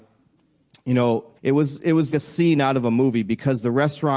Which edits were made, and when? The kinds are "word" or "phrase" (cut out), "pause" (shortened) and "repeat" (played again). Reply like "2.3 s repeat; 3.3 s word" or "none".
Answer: 1.3 s pause; 2.1 s word